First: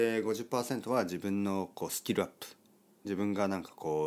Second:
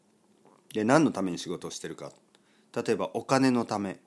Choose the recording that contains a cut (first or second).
first